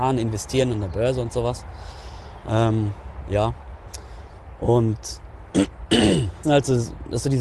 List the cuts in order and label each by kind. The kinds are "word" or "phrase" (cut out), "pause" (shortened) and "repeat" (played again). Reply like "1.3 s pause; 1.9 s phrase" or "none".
6.4 s word